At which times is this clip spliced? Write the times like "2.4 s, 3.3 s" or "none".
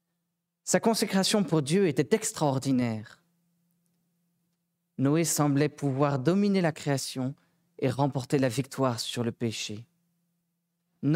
none